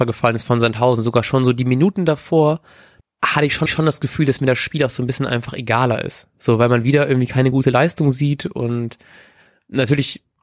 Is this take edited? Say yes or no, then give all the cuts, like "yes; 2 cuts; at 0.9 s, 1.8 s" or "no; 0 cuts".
yes; 2 cuts; at 3.0 s, 3.7 s